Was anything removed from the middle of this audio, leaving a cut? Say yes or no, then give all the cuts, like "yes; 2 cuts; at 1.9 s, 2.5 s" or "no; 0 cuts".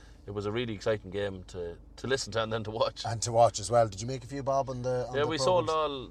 no; 0 cuts